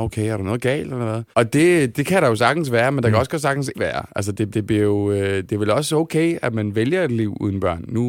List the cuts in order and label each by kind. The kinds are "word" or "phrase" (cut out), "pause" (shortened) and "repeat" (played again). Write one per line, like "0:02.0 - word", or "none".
0:01.3 - pause
0:01.9 - word
0:03.7 - word
0:04.5 - repeat
0:05.5 - word